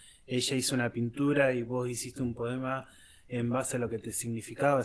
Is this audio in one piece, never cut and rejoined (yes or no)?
yes